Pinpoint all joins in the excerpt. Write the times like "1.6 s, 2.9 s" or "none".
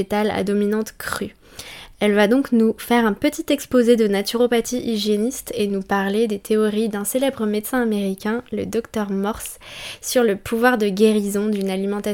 none